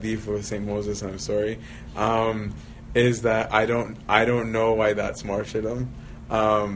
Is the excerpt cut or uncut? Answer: uncut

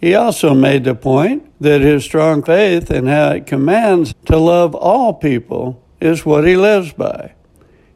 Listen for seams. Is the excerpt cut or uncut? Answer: cut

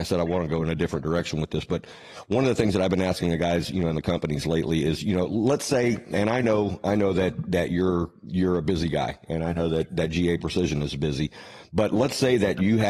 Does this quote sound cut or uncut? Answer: uncut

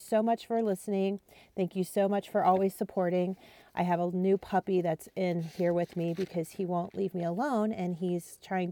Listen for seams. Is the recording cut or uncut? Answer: uncut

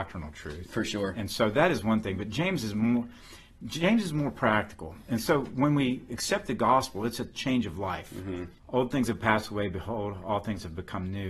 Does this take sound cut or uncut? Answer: cut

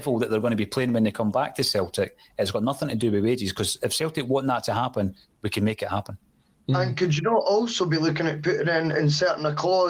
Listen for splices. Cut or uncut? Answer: uncut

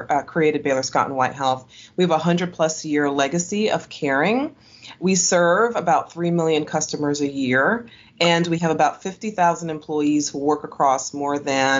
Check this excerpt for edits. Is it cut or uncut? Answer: uncut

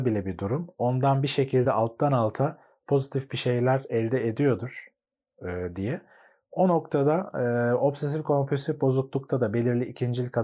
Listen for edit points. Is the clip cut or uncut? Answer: uncut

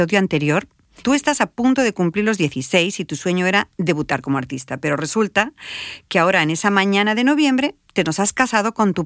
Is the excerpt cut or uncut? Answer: uncut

